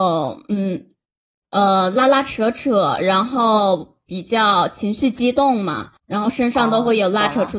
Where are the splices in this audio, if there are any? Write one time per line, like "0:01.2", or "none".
0:06.0

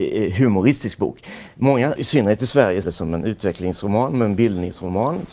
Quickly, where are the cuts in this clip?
0:02.0
0:02.8

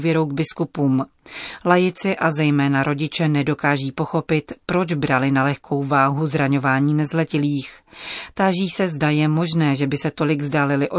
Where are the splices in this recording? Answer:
none

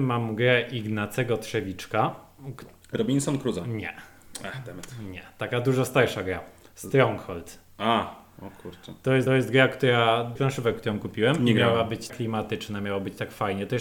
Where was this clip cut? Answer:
0:09.3
0:10.4
0:12.1

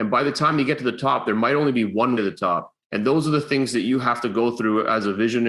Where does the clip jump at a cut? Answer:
0:02.2
0:02.8

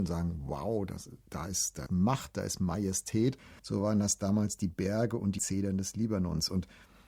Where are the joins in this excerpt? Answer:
0:01.9
0:03.6
0:05.4

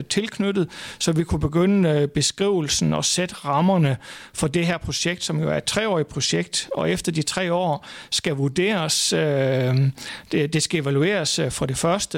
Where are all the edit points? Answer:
none

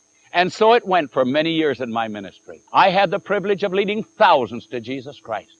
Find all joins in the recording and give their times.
0:02.7

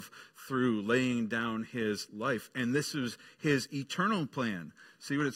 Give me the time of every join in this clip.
none

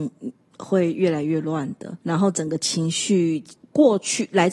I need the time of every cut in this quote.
0:02.0
0:03.5

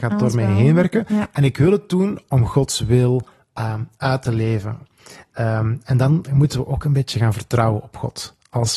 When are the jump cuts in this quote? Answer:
none

